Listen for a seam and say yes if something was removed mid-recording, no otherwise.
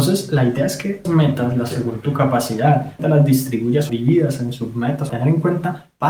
yes